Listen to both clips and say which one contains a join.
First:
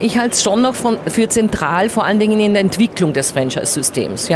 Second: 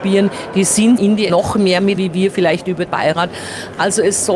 second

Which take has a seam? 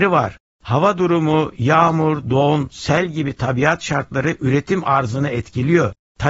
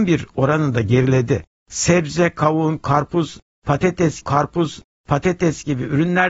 second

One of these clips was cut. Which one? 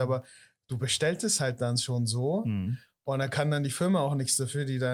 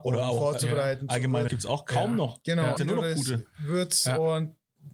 second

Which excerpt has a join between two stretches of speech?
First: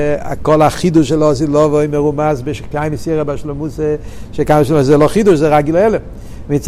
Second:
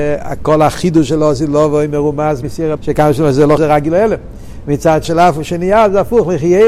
second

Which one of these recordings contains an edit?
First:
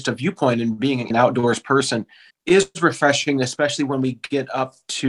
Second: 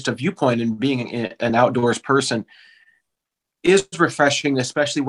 first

